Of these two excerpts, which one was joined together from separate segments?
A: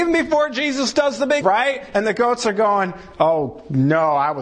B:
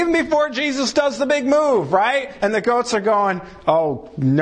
A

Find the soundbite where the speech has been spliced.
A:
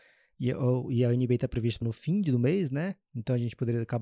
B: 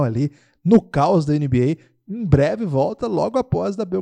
A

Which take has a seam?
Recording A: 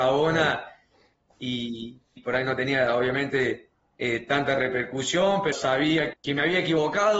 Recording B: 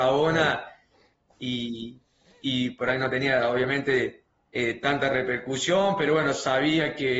A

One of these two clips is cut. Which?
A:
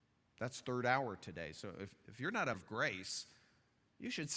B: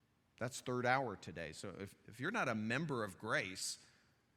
A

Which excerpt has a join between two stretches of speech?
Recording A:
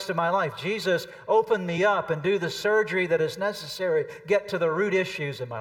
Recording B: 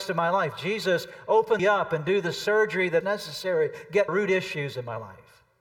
B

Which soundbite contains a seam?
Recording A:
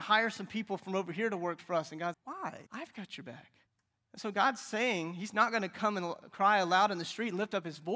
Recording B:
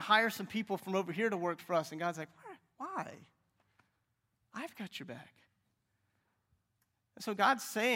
A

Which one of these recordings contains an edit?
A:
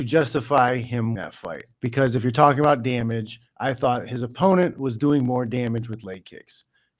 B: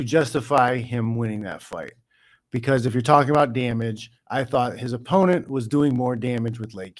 A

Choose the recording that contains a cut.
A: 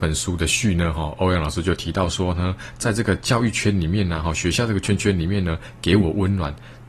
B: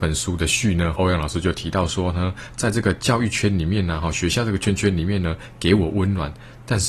B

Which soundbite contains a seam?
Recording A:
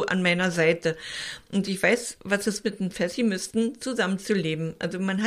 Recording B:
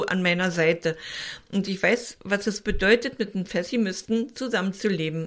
A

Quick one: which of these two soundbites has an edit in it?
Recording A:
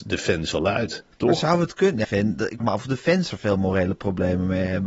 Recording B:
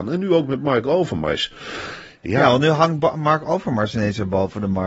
A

